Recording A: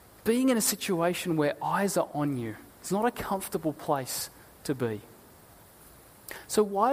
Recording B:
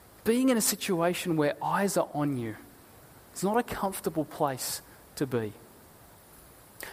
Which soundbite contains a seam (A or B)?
A